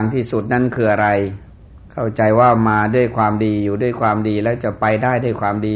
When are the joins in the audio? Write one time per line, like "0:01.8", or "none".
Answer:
0:01.8